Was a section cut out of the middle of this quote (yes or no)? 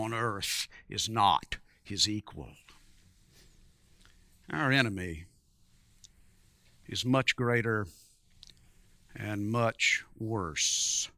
no